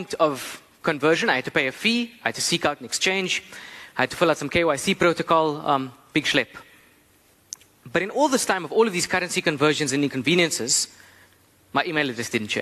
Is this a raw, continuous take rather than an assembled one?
yes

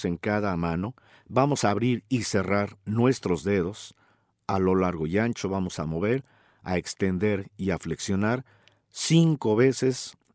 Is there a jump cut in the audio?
no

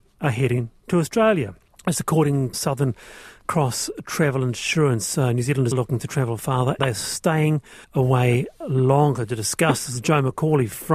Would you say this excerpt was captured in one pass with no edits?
no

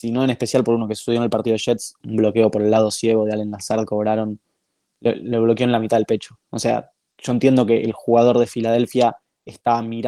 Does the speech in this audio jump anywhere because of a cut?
yes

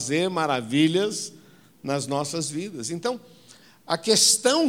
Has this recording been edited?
no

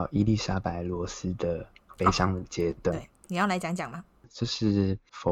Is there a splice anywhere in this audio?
no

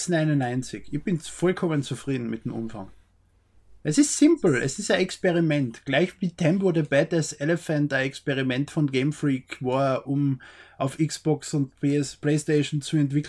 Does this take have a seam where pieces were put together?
no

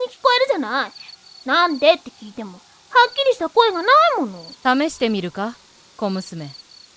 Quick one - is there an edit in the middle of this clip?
no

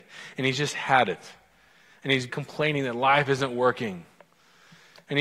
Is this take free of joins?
no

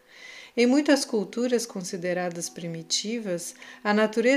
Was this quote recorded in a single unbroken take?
yes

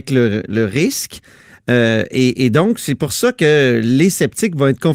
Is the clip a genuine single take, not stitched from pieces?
yes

